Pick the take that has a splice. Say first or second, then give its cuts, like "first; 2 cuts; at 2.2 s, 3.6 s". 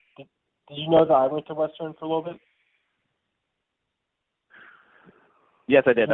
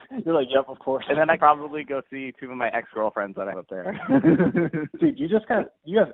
second; 2 cuts; at 1.4 s, 3.5 s